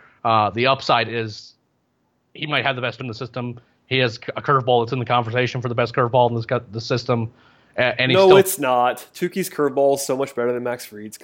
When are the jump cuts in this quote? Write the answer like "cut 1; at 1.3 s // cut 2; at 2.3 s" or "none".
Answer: cut 1; at 3.0 s